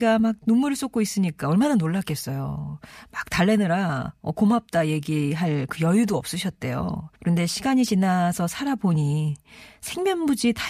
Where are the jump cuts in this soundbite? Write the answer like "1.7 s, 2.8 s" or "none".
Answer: 7.2 s